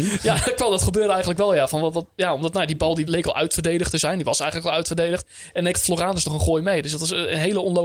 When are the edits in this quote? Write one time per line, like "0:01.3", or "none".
0:03.1
0:05.7